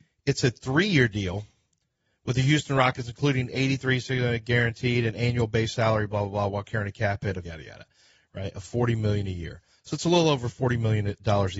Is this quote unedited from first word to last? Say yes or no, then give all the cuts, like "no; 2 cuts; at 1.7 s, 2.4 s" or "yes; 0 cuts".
no; 1 cut; at 7.4 s